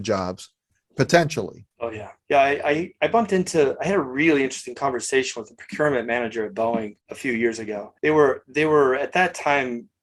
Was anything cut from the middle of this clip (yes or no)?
yes